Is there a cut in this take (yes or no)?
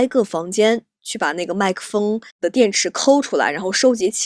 yes